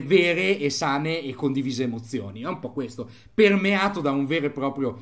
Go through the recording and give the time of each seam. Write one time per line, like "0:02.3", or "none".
none